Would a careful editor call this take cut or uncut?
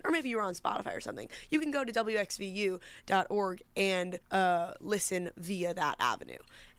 cut